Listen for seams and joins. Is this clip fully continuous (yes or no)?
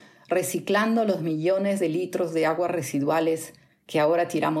yes